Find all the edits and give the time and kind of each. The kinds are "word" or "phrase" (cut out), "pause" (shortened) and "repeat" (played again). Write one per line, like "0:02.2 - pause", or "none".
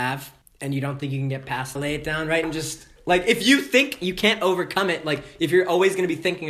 0:01.7 - phrase
0:02.4 - word